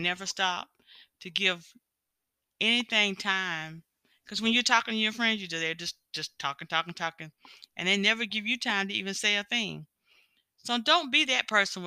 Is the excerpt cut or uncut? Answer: uncut